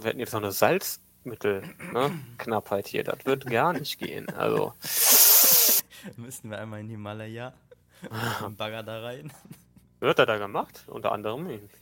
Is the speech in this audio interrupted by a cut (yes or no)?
no